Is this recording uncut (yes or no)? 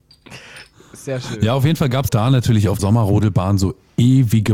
no